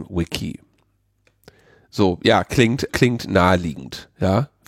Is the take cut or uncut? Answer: cut